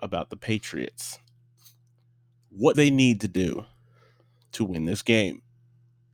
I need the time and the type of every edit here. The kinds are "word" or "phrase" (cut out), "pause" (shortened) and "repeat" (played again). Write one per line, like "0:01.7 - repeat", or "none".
0:02.7 - word